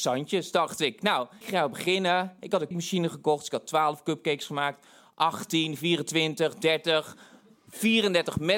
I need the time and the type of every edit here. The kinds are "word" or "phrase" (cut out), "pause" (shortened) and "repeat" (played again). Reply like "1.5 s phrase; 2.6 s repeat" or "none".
1.4 s word; 2.7 s word